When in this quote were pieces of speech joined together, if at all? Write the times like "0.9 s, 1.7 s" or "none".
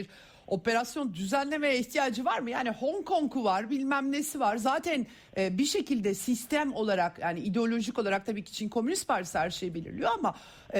none